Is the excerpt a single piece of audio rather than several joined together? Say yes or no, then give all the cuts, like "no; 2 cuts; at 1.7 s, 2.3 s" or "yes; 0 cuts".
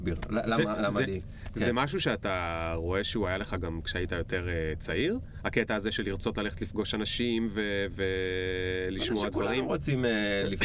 yes; 0 cuts